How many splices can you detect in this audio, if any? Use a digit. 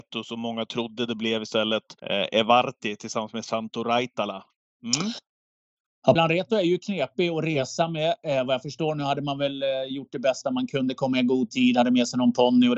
3